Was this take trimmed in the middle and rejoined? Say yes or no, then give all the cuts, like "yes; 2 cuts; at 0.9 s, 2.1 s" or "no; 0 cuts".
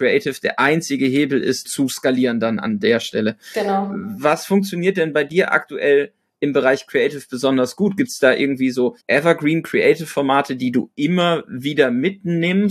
yes; 2 cuts; at 1.6 s, 9.0 s